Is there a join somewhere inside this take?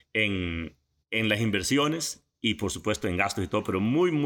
no; 0 cuts

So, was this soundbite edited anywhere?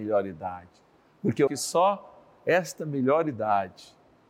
yes; 1 cut; at 1.5 s

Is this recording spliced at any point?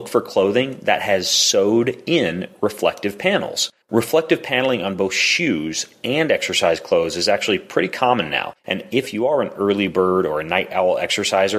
yes; 2 cuts; at 3.8 s, 8.6 s

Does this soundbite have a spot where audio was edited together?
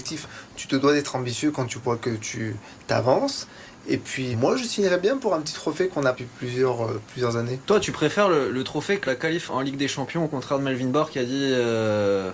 yes; 4 cuts; at 4.3 s, 6.2 s, 9.1 s, 9.5 s

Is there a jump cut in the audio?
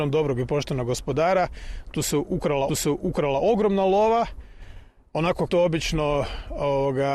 yes; 2 cuts; at 2.7 s, 5.5 s

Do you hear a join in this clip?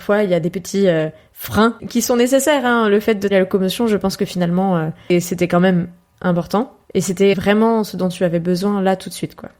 yes; 3 cuts; at 3.3 s, 6.8 s, 7.3 s

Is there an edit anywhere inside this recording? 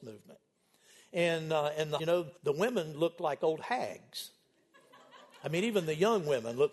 yes; 2 cuts; at 2.0 s, 2.4 s

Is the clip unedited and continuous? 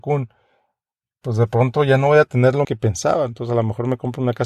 no; 1 cut; at 2.6 s

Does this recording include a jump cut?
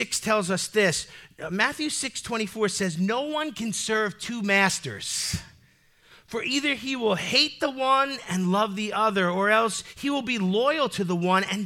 no; 0 cuts

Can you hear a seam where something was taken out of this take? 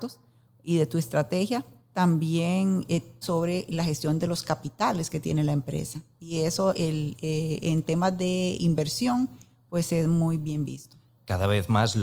yes; 1 cut; at 3.2 s

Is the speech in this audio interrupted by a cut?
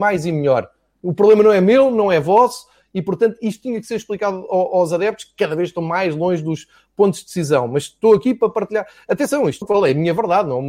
yes; 1 cut; at 9.6 s

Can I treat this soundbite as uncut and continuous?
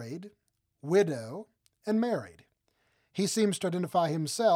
yes; 0 cuts

